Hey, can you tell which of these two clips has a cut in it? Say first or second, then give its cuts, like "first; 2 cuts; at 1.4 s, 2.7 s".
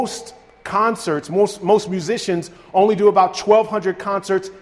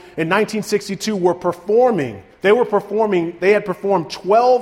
second; 1 cut; at 2.3 s